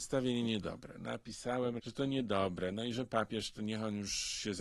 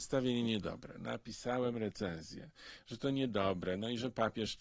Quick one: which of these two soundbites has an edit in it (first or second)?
first